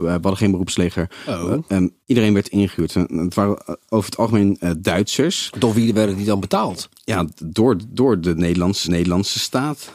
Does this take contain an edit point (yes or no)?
yes